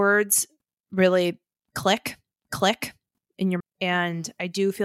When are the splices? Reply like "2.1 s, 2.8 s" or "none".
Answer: 2.3 s, 3.6 s